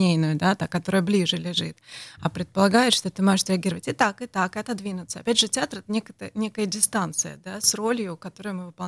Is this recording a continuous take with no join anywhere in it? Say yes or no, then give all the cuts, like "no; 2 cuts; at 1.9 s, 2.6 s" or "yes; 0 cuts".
yes; 0 cuts